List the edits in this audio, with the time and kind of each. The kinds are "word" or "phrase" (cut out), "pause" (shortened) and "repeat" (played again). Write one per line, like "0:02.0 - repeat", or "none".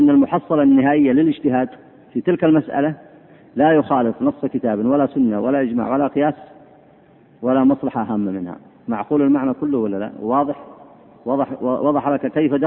none